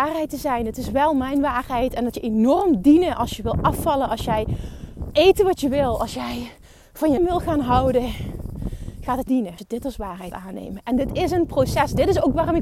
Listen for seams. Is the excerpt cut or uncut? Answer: cut